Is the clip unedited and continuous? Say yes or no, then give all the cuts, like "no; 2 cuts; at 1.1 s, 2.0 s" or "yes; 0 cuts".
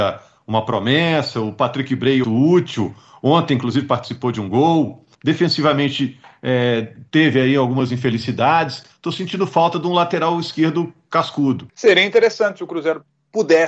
no; 4 cuts; at 2.2 s, 5.1 s, 7.1 s, 8.9 s